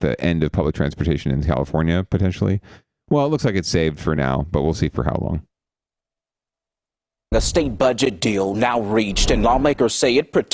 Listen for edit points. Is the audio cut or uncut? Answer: uncut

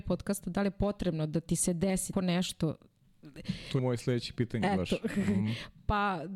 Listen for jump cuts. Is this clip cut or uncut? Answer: cut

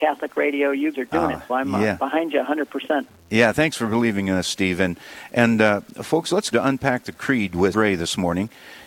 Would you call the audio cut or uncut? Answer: cut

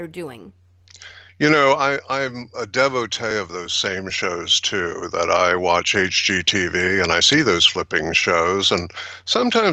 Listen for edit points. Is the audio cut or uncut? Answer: uncut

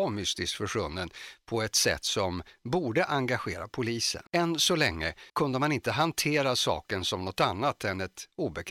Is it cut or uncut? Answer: cut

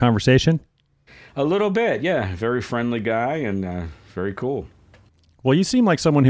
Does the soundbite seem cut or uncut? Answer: uncut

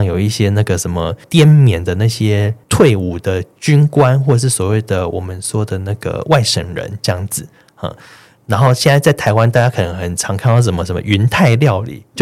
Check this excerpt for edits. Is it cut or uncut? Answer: uncut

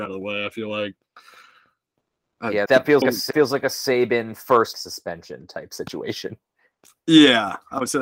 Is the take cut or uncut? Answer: cut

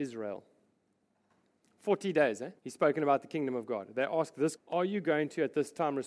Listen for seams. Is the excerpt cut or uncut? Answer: cut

